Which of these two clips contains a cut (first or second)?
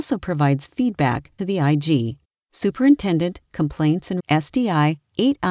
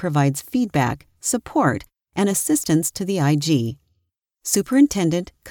first